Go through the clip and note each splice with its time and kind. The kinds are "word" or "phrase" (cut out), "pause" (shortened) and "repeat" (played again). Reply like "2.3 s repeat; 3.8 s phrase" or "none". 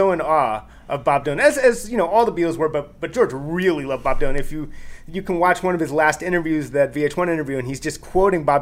none